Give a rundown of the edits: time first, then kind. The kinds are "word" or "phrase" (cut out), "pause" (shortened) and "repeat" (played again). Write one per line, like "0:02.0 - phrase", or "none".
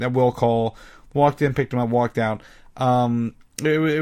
none